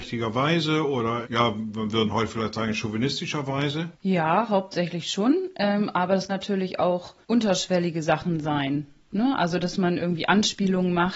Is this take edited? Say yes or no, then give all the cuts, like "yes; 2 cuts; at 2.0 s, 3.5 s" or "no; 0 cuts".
yes; 4 cuts; at 1.2 s, 3.9 s, 6.3 s, 7.2 s